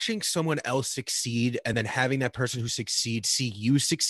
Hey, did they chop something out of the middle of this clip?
no; 0 cuts

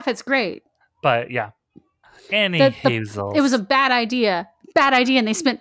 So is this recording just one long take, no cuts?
yes; 0 cuts

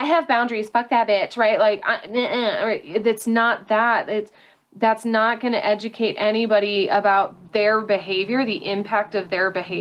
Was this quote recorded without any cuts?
yes; 0 cuts

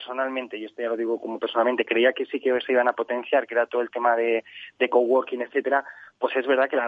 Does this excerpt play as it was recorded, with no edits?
yes; 0 cuts

